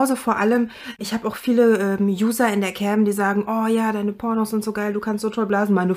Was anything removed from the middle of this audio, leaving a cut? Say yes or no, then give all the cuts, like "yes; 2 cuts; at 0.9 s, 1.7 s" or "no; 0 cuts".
no; 0 cuts